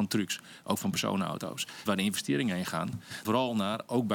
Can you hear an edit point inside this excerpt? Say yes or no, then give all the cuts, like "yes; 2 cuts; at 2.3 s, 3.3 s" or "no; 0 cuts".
yes; 2 cuts; at 1.9 s, 3.2 s